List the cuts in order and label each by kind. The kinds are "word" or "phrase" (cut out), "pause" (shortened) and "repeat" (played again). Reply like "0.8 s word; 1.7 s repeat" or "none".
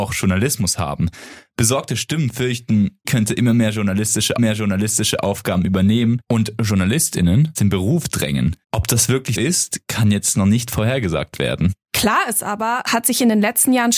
3.0 s word; 4.4 s repeat; 7.6 s word; 8.6 s pause; 9.3 s word; 12.9 s phrase